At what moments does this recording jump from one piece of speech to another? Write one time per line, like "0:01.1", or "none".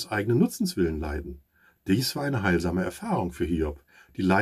none